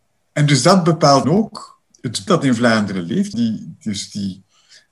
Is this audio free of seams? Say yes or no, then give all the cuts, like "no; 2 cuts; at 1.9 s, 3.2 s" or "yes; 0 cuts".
no; 3 cuts; at 1.2 s, 2.3 s, 3.3 s